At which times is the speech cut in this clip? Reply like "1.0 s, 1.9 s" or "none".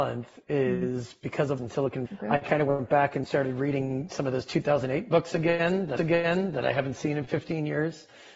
1.6 s, 2.1 s, 6.0 s